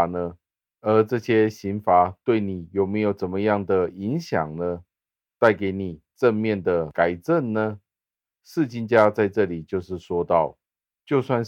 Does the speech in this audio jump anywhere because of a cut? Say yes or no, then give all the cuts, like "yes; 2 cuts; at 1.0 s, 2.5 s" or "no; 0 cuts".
no; 0 cuts